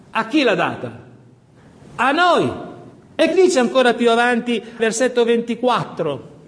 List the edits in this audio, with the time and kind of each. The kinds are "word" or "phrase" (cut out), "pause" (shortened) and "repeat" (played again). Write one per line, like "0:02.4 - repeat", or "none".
0:03.3 - word
0:04.8 - word

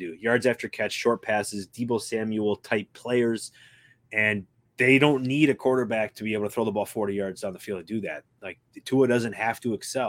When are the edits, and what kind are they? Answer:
none

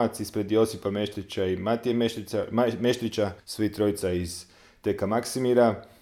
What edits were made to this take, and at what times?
0:03.4 - pause

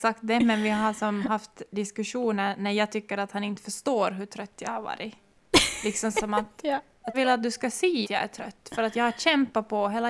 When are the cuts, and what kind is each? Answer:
0:06.1 - word
0:07.1 - word
0:08.0 - word

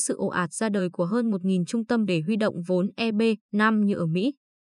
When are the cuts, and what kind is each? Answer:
0:02.1 - word
0:03.4 - pause

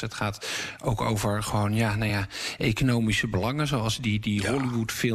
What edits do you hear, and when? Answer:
none

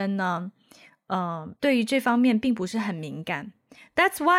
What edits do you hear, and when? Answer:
0:01.6 - pause

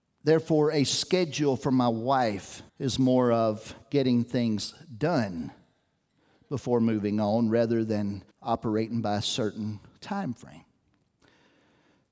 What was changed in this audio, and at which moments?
0:02.7 - pause
0:08.3 - pause

